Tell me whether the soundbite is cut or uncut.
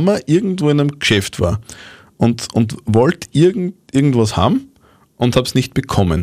uncut